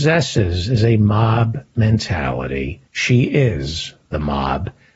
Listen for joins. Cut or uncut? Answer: cut